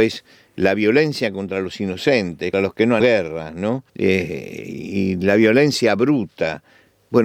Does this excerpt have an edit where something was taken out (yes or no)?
yes